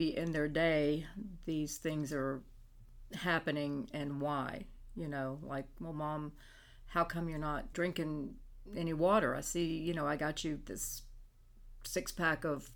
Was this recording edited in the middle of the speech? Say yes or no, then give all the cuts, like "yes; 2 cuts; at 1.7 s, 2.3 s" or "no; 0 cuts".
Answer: yes; 1 cut; at 7.7 s